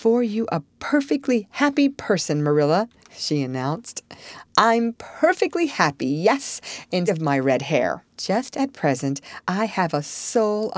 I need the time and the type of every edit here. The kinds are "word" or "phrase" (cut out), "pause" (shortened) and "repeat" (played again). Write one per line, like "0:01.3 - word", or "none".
0:03.0 - pause
0:07.1 - word
0:08.1 - pause